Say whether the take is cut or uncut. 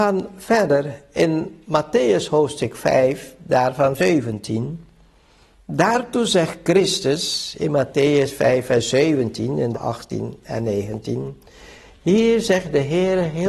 cut